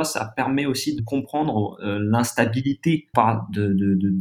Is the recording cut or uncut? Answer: cut